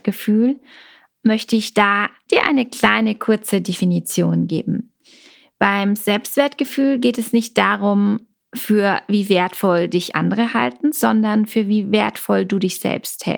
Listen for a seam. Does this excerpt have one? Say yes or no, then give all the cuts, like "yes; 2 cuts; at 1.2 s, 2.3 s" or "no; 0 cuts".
no; 0 cuts